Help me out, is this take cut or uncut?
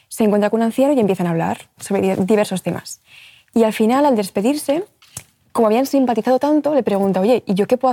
uncut